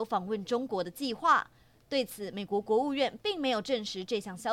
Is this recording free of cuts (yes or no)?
yes